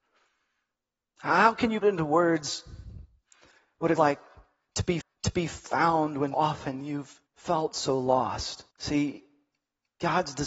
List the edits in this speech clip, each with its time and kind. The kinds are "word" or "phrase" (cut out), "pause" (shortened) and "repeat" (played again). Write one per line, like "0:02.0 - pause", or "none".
0:01.8 - word
0:04.0 - word
0:05.0 - repeat
0:06.3 - word
0:07.3 - pause
0:08.7 - pause

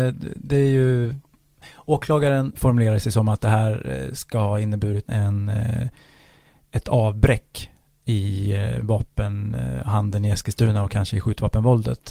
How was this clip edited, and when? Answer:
0:02.5 - word
0:05.1 - word

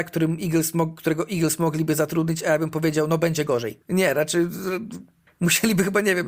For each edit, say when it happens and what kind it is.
0:03.8 - pause
0:05.3 - pause

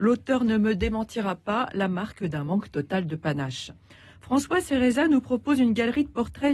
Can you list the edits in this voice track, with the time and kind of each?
none

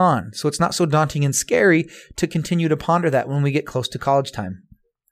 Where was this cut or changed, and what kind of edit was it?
none

